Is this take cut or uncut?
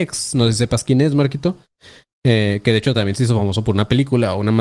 uncut